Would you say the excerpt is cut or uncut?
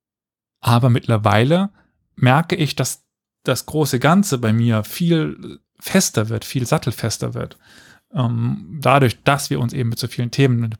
uncut